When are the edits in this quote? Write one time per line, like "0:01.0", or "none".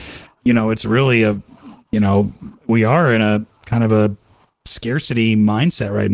none